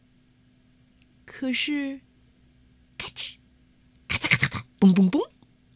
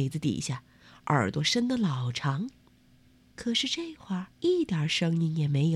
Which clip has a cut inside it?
second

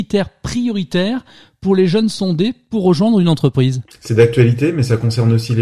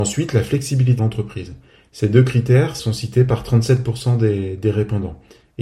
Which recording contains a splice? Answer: second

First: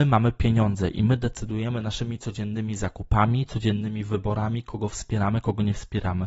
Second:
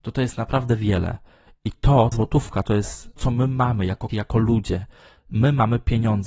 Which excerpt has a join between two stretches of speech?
second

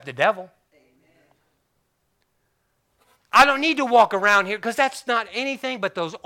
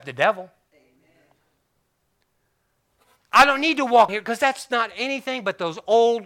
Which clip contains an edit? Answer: second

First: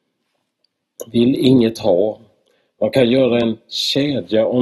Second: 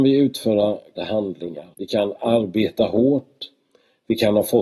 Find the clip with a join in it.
second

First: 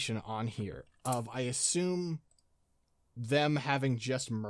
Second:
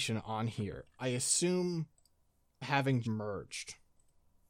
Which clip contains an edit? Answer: second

